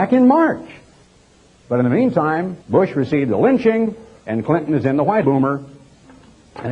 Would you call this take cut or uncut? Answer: cut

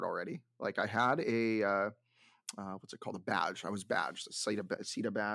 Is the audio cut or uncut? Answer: uncut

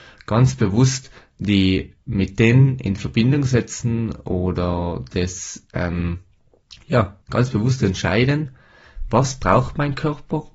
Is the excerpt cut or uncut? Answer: cut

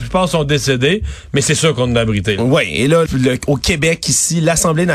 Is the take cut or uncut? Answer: cut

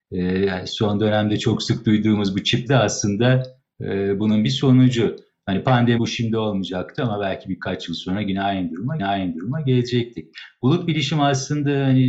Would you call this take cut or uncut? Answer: cut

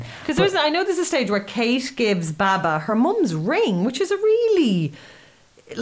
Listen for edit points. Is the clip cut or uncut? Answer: uncut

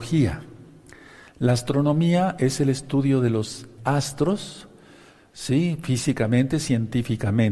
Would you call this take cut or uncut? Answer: cut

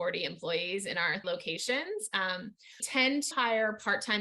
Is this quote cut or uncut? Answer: cut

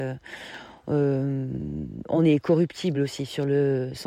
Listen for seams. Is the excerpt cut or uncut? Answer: uncut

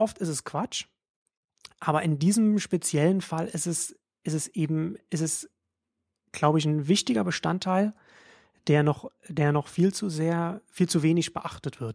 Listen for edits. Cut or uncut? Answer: uncut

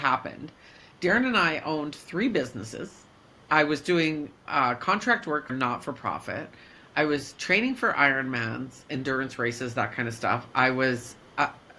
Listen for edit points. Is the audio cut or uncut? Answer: cut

